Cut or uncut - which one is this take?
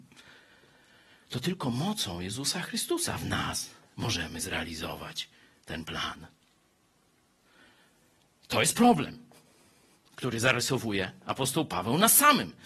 uncut